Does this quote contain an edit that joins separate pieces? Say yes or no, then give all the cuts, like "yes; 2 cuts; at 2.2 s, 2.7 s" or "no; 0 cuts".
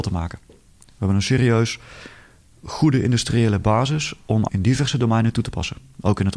yes; 1 cut; at 4.5 s